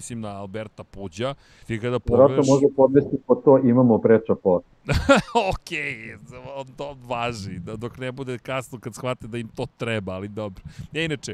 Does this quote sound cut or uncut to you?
cut